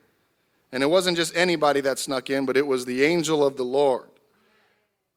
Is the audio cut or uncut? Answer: uncut